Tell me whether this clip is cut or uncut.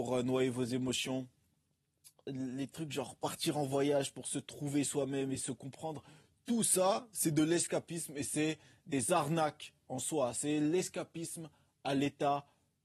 uncut